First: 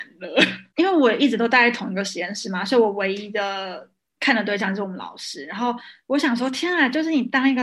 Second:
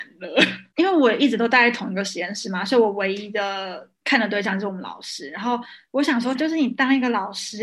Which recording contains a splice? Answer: second; 2 cuts; at 3.9 s, 6.3 s

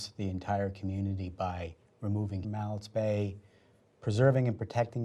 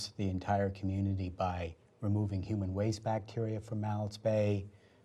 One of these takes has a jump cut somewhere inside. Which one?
first; 1 cut; at 2.4 s

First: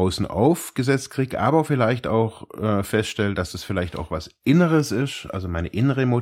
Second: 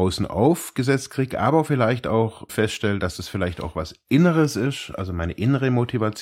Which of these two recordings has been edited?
second; 1 cut; at 2.5 s

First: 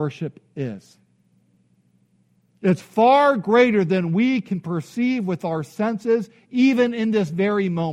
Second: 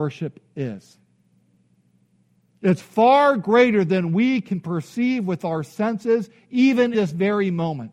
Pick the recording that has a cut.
second; 1 cut; at 6.9 s

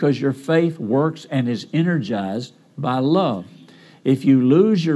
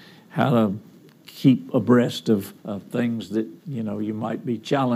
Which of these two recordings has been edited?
second; 2 cuts; at 2.6 s, 3.6 s

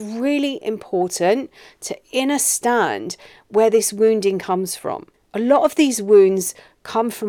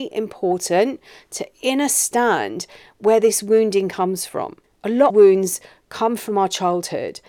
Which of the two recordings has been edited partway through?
second; 1 cut; at 5.1 s

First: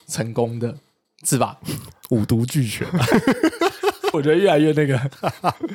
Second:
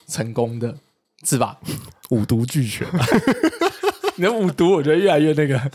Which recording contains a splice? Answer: first; 1 cut; at 4.1 s

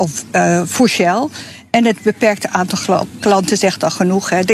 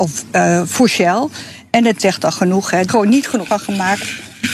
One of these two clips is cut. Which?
second; 3 cuts; at 2.0 s, 2.9 s, 3.5 s

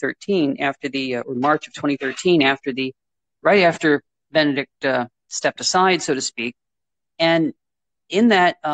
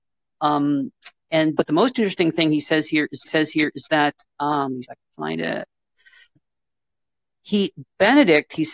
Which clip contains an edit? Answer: second; 3 cuts; at 3.2 s, 4.8 s, 6.4 s

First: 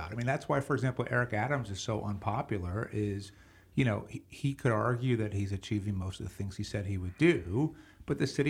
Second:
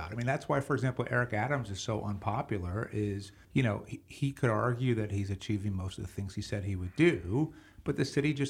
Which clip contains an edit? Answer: second; 1 cut; at 3.4 s

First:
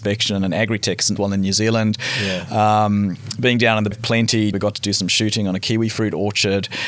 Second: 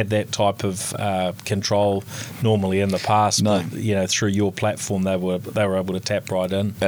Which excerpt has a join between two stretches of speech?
first; 3 cuts; at 1.2 s, 3.9 s, 4.5 s

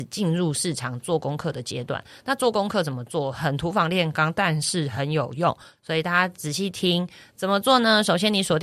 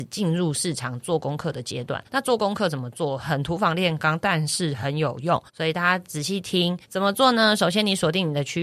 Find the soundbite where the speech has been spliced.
second; 3 cuts; at 2.1 s, 5.5 s, 6.8 s

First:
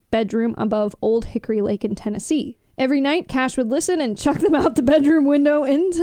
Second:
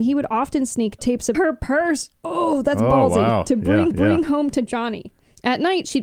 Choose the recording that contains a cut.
second; 3 cuts; at 1.0 s, 1.3 s, 3.9 s

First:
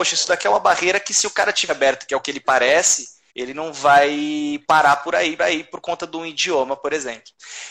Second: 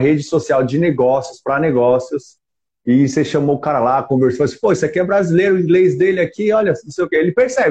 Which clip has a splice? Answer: first; 3 cuts; at 1.7 s, 3.3 s, 5.4 s

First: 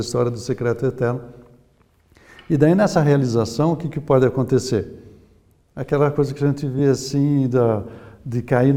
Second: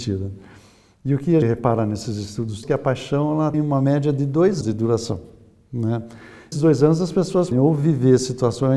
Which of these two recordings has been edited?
second; 6 cuts; at 1.4 s, 2.6 s, 3.5 s, 4.6 s, 6.5 s, 7.5 s

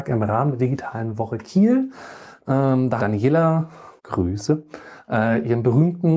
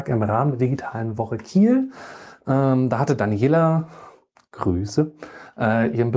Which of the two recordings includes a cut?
first; 2 cuts; at 3.0 s, 4.0 s

